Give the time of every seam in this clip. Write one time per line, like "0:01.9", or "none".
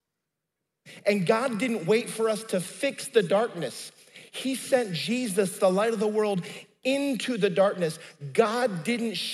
none